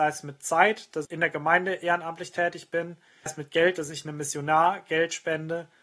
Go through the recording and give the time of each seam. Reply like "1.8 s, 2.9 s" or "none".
1.0 s, 3.3 s